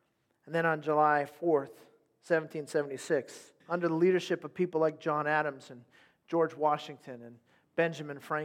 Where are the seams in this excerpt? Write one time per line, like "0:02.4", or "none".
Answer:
0:03.6